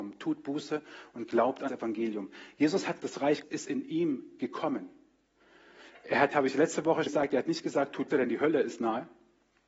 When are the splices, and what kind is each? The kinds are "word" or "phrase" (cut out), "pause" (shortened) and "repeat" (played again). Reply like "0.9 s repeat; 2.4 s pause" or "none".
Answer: 1.7 s word; 3.0 s word; 3.4 s word; 6.3 s word; 7.1 s word; 8.1 s word